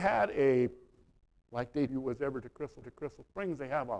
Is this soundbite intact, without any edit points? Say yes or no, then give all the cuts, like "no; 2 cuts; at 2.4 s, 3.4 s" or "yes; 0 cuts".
no; 2 cuts; at 1.9 s, 2.8 s